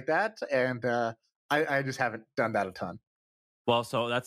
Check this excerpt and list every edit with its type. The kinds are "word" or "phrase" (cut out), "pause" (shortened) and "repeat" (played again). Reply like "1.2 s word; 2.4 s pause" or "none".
none